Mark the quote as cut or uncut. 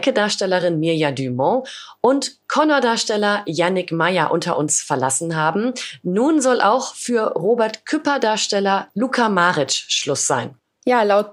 uncut